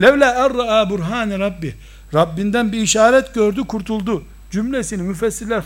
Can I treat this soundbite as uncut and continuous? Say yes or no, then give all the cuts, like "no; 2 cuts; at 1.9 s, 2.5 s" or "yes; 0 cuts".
yes; 0 cuts